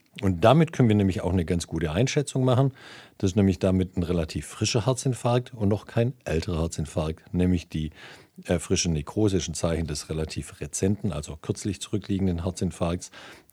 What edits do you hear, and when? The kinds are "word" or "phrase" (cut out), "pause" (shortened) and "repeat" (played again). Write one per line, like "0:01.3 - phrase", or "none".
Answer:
none